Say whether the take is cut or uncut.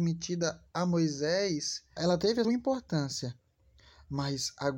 cut